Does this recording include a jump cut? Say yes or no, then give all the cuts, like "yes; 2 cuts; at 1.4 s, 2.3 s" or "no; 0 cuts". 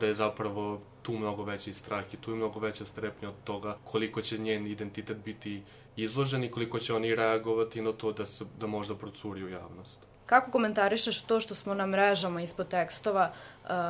yes; 3 cuts; at 3.8 s, 5.9 s, 10.1 s